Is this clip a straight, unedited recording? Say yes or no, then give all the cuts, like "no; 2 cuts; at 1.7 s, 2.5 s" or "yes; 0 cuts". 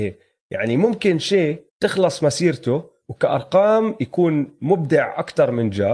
no; 1 cut; at 1.7 s